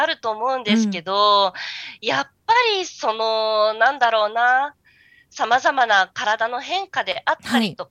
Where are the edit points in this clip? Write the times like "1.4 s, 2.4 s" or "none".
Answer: none